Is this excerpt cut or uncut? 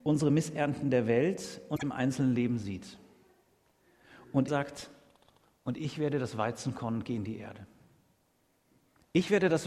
cut